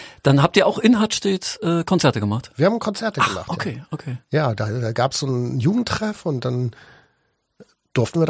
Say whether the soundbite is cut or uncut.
cut